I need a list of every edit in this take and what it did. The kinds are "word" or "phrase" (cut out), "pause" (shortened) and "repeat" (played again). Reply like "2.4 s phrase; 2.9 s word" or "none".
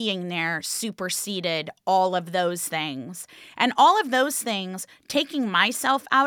none

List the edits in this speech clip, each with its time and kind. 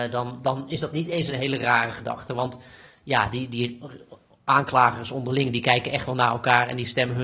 none

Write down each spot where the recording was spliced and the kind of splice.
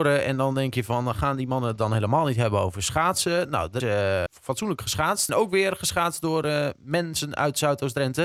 3.8 s word; 4.3 s word; 5.3 s word

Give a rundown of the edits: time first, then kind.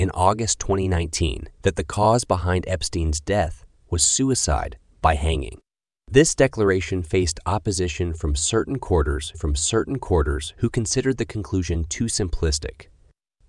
1.6 s pause; 9.3 s repeat

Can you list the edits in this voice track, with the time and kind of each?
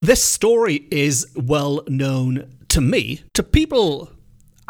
1.3 s word; 3.3 s pause

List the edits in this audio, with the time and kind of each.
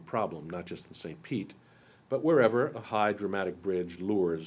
none

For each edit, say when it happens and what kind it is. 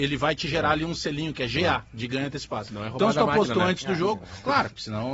none

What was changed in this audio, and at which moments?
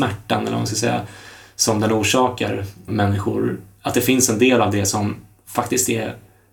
2.9 s word

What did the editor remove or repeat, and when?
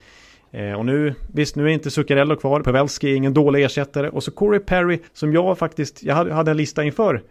2.6 s phrase; 5.1 s pause

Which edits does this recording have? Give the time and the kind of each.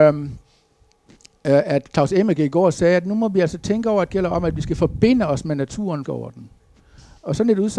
4.1 s phrase; 6.0 s phrase

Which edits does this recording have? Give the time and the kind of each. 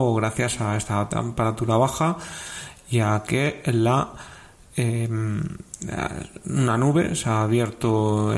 none

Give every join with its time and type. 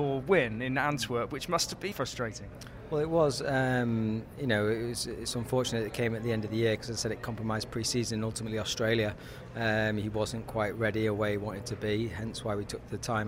1.9 s word

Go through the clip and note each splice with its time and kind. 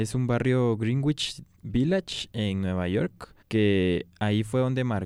3.4 s pause

